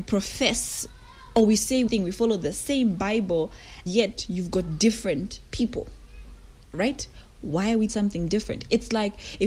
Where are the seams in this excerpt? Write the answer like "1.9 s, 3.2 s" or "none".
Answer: 1.9 s, 3.9 s, 7.9 s